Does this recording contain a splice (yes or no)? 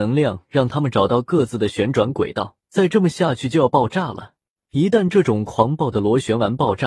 yes